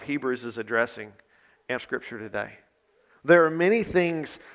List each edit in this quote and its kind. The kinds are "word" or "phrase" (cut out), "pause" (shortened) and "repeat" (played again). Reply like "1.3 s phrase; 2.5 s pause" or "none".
1.8 s phrase